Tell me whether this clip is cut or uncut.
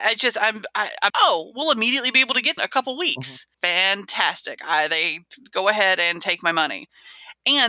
cut